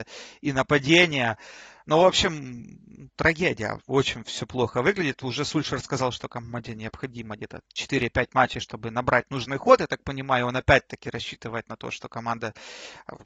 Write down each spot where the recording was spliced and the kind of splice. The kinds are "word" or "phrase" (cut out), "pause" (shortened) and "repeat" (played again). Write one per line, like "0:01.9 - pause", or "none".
0:07.6 - word

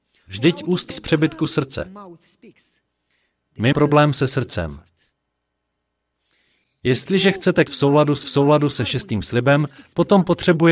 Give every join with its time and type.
0:00.9 - word
0:03.7 - word
0:07.7 - word
0:08.2 - repeat

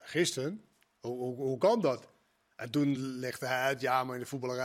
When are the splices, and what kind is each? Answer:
none

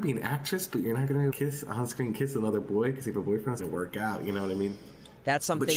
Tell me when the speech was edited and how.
0:01.3 - phrase
0:03.6 - phrase

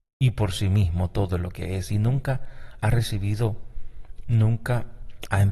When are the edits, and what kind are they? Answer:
none

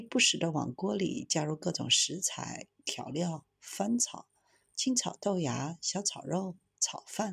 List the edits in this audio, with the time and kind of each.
none

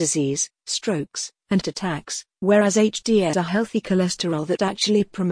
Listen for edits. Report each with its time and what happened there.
0:01.6 - word
0:03.3 - word

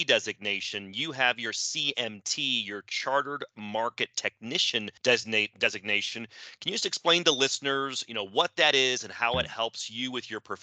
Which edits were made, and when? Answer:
0:05.0 - pause

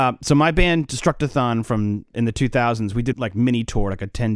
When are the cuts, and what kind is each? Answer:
0:02.1 - word
0:03.1 - word

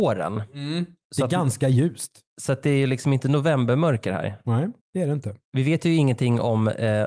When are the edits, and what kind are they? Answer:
0:04.8 - pause
0:05.4 - pause

